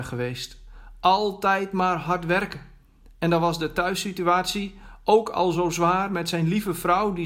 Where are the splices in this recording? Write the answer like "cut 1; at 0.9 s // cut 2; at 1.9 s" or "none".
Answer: none